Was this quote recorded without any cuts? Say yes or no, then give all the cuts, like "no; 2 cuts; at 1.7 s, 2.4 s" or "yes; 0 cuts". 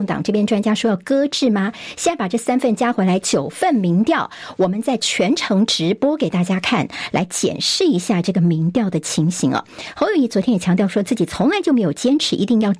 yes; 0 cuts